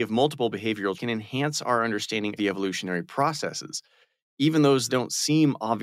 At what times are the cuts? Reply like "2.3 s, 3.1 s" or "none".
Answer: 0.9 s, 2.4 s, 4.9 s